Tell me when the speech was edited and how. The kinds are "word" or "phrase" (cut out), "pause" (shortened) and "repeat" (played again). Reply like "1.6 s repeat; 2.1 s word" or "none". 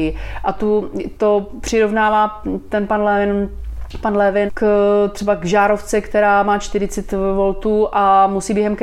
4.5 s word